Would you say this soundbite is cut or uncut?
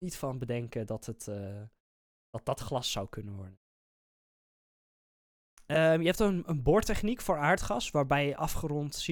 uncut